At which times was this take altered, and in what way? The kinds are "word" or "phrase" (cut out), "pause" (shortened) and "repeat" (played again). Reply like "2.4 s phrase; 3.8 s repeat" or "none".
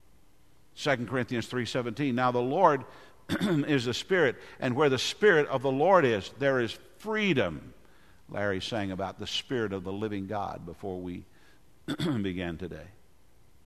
none